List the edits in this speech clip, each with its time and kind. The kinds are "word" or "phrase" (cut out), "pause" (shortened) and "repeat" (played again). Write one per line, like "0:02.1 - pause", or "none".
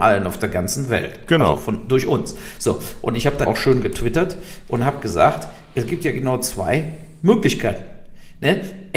0:03.5 - word